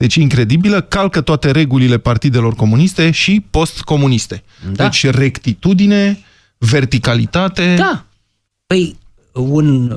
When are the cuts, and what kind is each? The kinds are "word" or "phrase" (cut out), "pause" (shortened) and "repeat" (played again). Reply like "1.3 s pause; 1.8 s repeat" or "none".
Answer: none

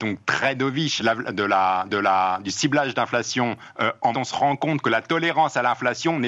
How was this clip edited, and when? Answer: 1.0 s phrase; 1.9 s repeat; 4.1 s phrase

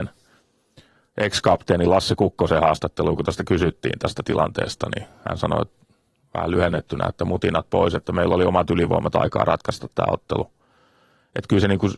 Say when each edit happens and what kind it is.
none

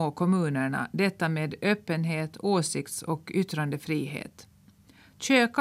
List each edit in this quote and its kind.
none

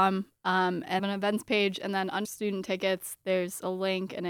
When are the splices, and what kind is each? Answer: 1.0 s phrase; 2.2 s phrase

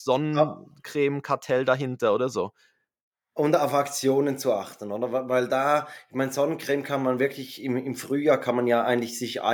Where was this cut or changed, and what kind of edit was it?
none

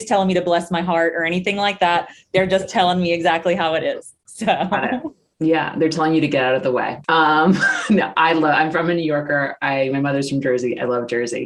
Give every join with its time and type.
none

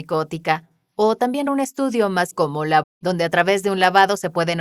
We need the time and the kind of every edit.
1.5 s word; 2.3 s word; 2.8 s word

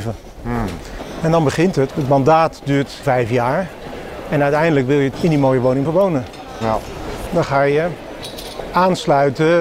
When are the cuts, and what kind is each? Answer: 1.9 s word; 3.0 s word; 5.1 s phrase; 5.8 s word

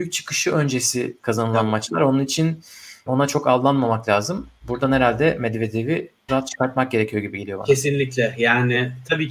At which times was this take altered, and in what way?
3.1 s word; 6.3 s word

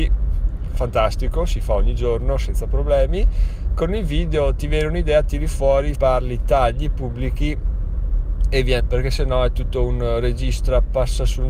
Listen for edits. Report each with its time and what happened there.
3.7 s word; 5.9 s phrase; 8.8 s word

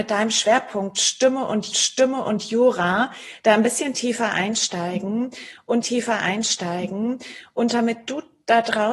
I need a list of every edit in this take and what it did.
1.7 s repeat; 5.8 s repeat

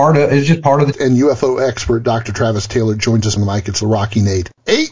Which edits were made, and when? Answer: 0.9 s phrase; 3.4 s word; 3.8 s phrase

